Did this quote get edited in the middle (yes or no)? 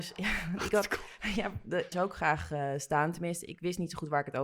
yes